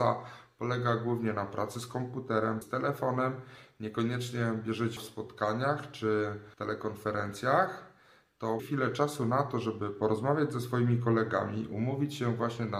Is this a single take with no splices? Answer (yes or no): no